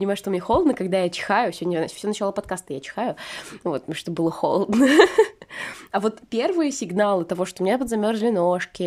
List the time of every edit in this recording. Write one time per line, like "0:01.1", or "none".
none